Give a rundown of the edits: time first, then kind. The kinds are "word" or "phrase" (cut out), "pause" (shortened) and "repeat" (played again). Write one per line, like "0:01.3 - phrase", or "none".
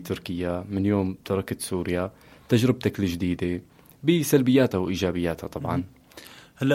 none